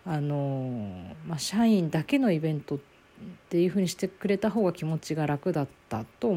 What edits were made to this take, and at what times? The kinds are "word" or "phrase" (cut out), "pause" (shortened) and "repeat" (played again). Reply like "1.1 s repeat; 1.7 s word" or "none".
none